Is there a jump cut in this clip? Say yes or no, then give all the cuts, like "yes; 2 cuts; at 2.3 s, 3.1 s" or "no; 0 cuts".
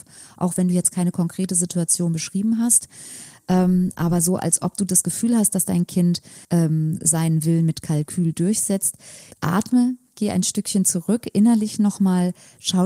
yes; 2 cuts; at 6.4 s, 9.3 s